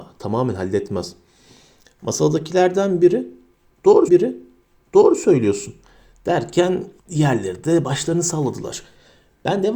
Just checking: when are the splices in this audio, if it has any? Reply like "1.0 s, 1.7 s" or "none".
4.1 s, 7.0 s